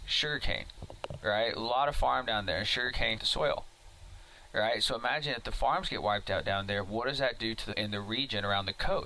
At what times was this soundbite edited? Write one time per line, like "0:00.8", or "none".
0:03.2
0:07.7